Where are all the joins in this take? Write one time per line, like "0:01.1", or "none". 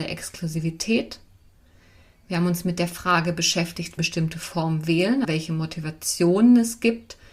0:04.0
0:05.2